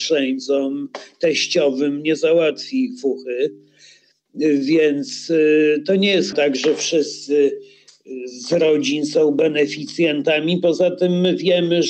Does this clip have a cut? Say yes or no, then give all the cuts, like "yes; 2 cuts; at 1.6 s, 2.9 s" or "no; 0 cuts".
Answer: yes; 1 cut; at 6.3 s